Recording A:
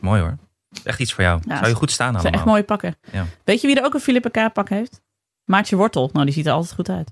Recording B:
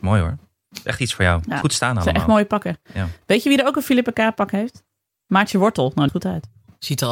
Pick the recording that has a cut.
B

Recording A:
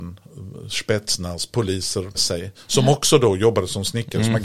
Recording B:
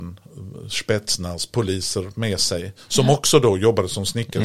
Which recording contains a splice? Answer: A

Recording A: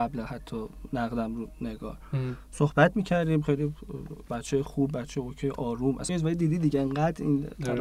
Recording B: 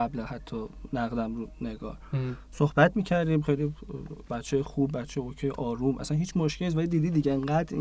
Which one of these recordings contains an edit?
A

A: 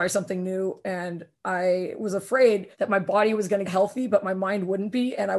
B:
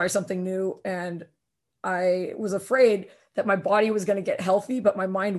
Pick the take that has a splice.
A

